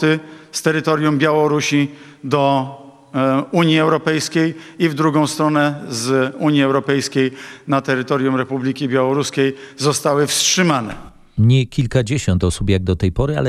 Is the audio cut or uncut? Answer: uncut